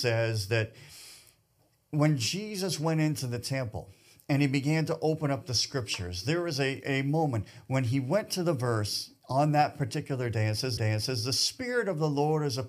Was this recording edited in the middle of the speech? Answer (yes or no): yes